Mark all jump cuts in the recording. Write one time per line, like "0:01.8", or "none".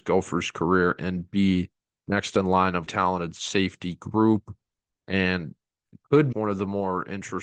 0:02.9
0:06.3